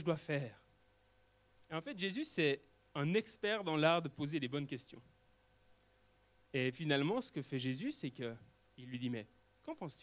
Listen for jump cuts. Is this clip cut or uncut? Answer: uncut